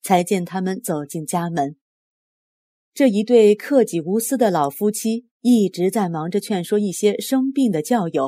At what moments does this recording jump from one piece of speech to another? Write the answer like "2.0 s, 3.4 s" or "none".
none